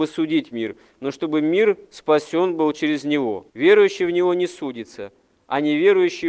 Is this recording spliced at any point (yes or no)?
yes